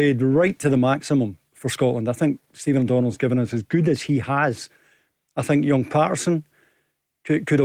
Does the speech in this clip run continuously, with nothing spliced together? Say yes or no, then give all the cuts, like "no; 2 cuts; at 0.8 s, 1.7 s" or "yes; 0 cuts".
yes; 0 cuts